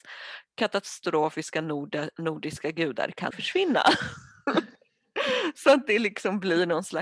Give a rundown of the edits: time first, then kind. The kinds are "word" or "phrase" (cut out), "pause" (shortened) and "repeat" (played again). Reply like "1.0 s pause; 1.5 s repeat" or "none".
3.3 s word